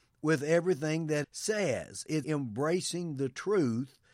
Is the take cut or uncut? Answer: cut